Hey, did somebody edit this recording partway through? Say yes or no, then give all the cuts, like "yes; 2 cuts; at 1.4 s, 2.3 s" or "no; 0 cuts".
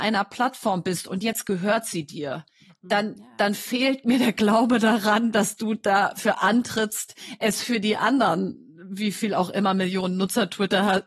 no; 0 cuts